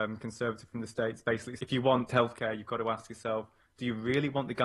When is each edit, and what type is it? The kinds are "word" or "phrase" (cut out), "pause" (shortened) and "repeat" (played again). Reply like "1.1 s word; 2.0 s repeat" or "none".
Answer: 1.6 s word; 2.1 s word